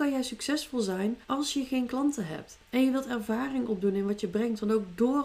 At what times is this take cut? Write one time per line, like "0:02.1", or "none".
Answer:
0:01.2
0:02.6